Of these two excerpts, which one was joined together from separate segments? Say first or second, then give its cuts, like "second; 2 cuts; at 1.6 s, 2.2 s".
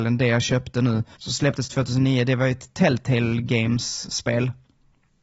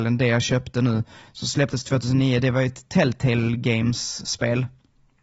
first; 1 cut; at 1.1 s